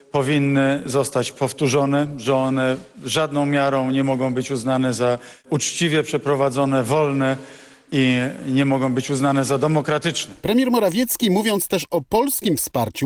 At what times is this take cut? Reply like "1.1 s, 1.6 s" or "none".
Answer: none